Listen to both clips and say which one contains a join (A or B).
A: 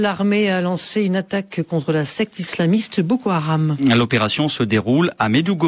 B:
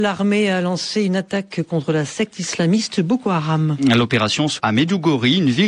B